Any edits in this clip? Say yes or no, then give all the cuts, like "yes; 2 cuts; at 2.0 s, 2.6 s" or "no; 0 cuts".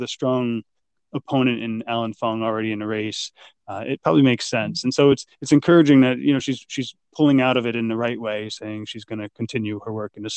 no; 0 cuts